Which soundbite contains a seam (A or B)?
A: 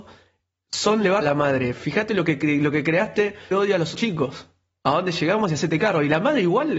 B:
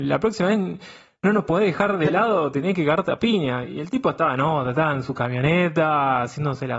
A